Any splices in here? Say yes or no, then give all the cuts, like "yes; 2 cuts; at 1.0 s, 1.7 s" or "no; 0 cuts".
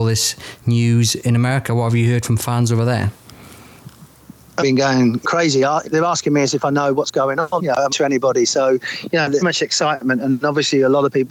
yes; 6 cuts; at 4.6 s, 5.2 s, 5.9 s, 7.6 s, 7.9 s, 9.4 s